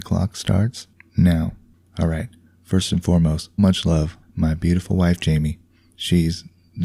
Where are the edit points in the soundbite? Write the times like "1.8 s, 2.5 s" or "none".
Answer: 3.6 s, 4.2 s